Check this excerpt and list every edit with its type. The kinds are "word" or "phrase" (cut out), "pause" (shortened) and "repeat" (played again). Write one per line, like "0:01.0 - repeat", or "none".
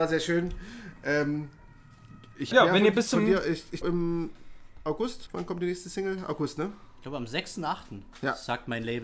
0:02.5 - phrase
0:03.8 - word
0:05.3 - word